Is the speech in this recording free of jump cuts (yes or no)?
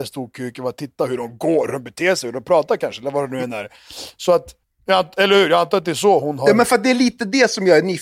no